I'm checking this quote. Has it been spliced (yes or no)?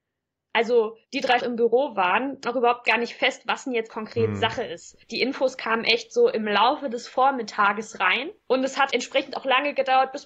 yes